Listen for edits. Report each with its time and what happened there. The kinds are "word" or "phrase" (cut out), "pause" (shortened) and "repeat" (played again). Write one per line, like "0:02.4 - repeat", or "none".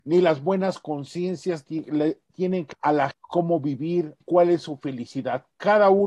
0:02.3 - word
0:02.7 - word
0:03.1 - word
0:04.2 - word